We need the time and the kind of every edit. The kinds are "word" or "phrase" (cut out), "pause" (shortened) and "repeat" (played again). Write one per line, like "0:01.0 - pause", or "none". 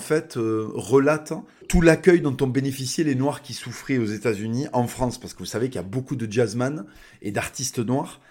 0:01.6 - word

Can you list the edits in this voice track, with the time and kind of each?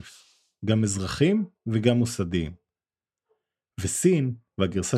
0:01.5 - pause

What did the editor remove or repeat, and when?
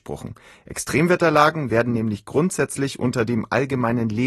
none

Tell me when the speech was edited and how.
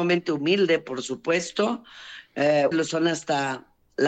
0:02.7 - word

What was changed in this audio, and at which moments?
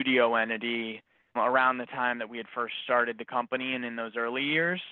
0:01.4 - word

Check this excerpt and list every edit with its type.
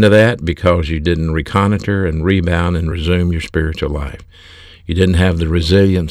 none

